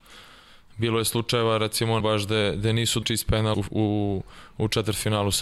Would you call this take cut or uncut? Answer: cut